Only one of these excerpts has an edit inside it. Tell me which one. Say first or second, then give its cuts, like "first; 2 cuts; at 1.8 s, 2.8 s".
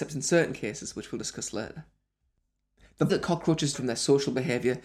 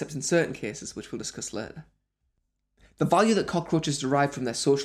first; 2 cuts; at 3.1 s, 3.7 s